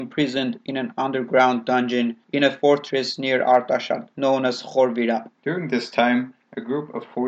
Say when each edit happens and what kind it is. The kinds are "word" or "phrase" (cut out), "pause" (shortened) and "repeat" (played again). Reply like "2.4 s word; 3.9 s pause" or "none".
2.2 s pause; 4.1 s pause; 5.4 s pause